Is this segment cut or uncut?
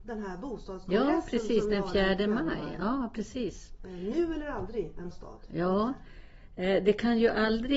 cut